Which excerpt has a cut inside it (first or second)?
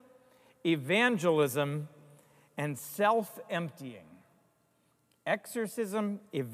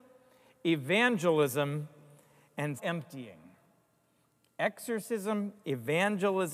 second